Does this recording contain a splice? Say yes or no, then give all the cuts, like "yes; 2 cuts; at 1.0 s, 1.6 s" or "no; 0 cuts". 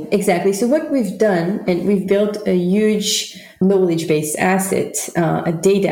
yes; 1 cut; at 3.6 s